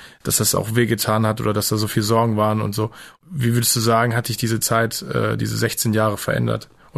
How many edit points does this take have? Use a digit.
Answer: 0